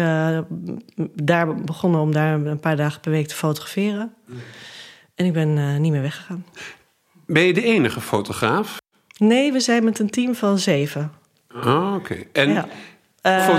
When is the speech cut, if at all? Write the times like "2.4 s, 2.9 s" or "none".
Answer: none